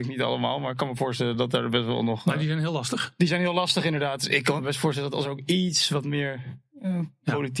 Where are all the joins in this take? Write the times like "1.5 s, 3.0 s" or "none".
none